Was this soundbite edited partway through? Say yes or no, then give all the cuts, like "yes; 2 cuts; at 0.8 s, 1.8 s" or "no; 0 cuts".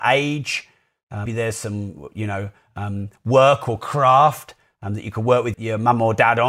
yes; 2 cuts; at 1.3 s, 5.5 s